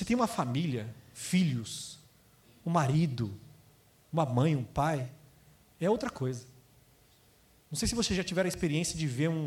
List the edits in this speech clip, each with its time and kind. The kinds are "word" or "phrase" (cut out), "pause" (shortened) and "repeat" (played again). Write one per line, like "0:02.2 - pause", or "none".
none